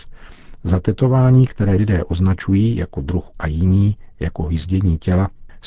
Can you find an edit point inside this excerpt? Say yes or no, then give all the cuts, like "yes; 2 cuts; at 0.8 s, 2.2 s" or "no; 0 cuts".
yes; 2 cuts; at 1.8 s, 3.3 s